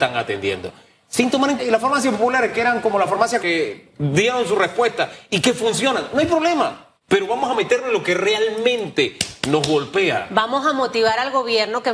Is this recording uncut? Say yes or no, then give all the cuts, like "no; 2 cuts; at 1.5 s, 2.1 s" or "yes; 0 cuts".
no; 2 cuts; at 1.6 s, 3.4 s